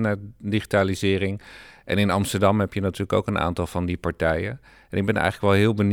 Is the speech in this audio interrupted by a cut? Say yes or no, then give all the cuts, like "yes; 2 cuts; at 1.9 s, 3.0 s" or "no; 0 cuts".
no; 0 cuts